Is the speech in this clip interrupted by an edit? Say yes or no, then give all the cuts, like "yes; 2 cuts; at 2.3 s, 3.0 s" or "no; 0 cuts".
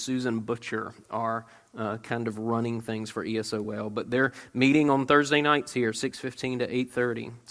no; 0 cuts